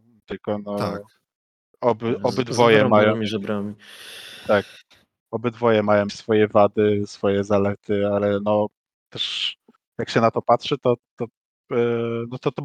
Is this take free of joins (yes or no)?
no